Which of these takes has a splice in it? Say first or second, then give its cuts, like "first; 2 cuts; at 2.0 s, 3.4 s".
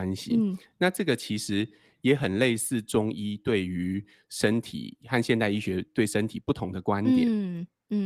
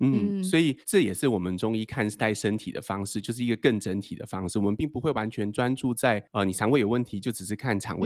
second; 1 cut; at 6.3 s